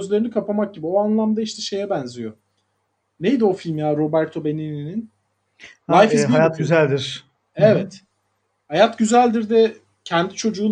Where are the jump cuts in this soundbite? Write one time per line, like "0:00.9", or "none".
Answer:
none